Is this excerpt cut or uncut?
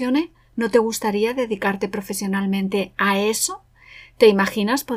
uncut